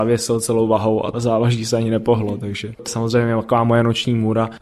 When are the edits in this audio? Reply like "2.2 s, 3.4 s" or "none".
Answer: 1.1 s, 2.9 s